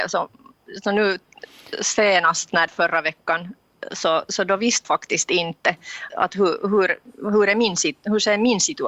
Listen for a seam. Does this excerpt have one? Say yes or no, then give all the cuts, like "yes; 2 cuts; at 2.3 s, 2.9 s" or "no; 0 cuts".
yes; 3 cuts; at 2.7 s, 4.8 s, 6.1 s